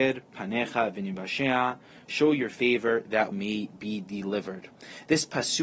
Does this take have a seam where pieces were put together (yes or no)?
yes